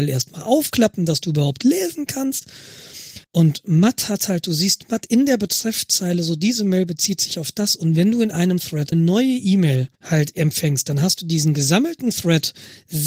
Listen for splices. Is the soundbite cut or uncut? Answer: cut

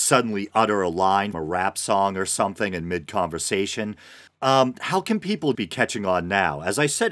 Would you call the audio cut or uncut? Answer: cut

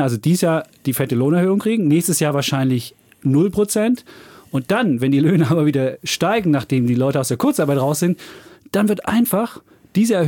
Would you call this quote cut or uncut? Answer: uncut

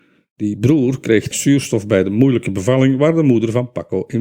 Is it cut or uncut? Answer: cut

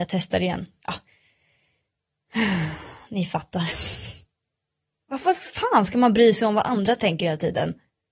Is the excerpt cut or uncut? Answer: uncut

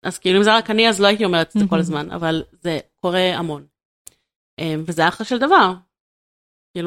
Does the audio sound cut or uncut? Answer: uncut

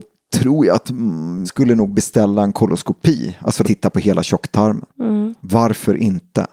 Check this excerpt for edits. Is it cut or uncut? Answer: cut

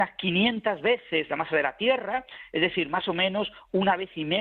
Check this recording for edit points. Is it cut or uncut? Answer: uncut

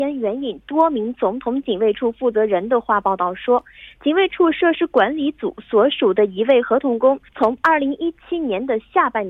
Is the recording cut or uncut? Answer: cut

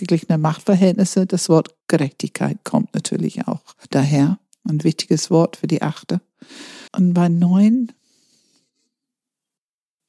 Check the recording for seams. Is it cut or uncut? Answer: cut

